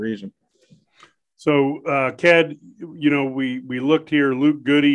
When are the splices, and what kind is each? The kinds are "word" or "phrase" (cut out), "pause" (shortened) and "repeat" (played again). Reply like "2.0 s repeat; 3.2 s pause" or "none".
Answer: none